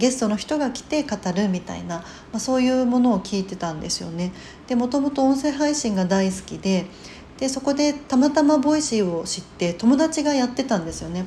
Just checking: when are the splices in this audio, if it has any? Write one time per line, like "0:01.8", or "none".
none